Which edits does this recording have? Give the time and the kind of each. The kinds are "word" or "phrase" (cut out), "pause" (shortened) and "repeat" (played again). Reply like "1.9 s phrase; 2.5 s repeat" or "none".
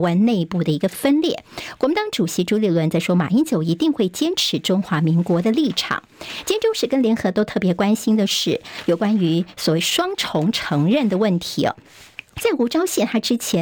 12.3 s pause